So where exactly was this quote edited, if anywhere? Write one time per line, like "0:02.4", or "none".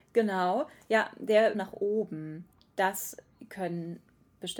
0:01.5
0:02.5